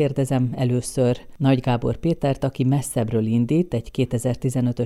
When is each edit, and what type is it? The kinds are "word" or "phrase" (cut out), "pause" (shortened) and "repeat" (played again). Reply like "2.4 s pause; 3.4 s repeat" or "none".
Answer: none